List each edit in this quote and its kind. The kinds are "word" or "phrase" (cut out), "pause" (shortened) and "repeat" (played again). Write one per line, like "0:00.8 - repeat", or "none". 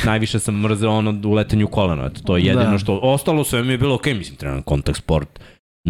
none